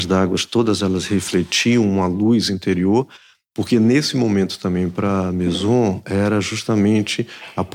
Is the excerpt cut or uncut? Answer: uncut